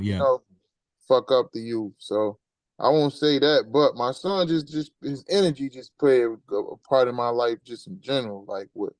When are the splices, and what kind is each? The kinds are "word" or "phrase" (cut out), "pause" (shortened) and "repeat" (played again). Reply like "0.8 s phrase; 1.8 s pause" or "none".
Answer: none